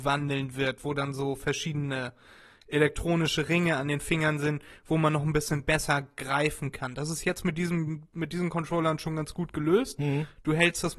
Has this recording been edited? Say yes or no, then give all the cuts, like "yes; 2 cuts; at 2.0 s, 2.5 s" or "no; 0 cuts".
no; 0 cuts